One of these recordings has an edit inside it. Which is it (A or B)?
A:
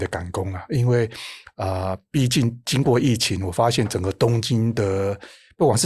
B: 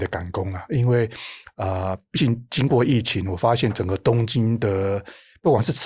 B